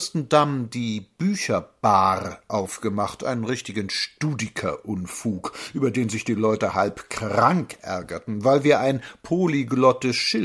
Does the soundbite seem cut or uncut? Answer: uncut